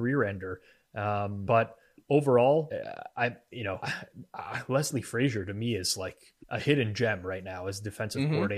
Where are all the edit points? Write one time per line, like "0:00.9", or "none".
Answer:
0:06.4